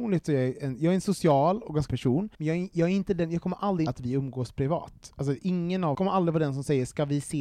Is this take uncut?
no; 4 cuts; at 1.9 s, 2.3 s, 3.9 s, 5.9 s

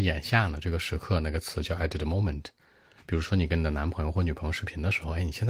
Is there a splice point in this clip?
no; 0 cuts

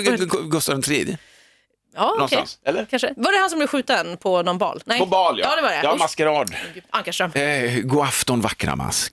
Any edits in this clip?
no; 0 cuts

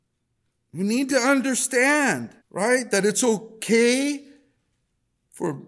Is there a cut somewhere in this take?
yes; 1 cut; at 2.4 s

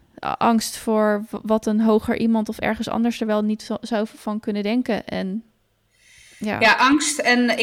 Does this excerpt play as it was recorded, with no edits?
no; 1 cut; at 5.7 s

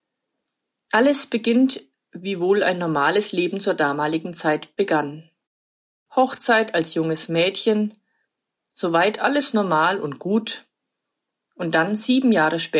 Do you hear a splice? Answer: no; 0 cuts

